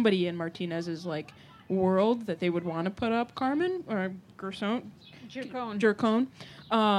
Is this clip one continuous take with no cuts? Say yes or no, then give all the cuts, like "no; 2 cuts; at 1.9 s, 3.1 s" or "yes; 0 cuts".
yes; 0 cuts